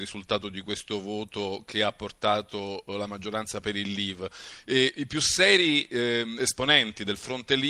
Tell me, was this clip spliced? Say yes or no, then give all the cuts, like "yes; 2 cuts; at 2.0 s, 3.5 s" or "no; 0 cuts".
no; 0 cuts